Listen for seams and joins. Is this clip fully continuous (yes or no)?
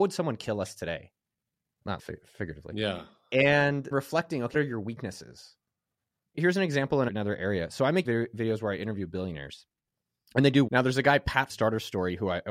no